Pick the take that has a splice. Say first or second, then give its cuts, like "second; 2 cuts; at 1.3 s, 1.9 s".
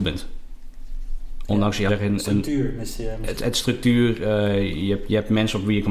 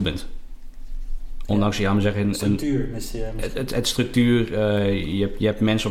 first; 2 cuts; at 1.9 s, 3.4 s